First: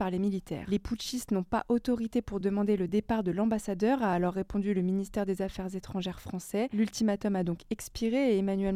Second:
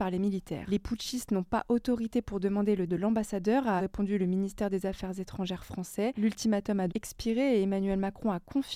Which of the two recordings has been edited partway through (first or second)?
second